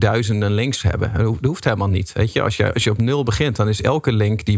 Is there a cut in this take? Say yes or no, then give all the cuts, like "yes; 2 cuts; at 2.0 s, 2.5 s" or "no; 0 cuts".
no; 0 cuts